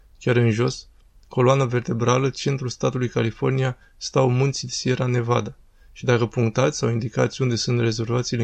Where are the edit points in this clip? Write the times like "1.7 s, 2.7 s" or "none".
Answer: none